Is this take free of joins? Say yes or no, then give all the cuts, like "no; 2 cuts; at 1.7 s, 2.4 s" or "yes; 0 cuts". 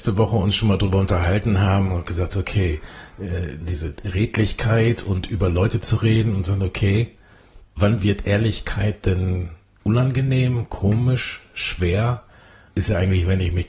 no; 2 cuts; at 3.6 s, 7.6 s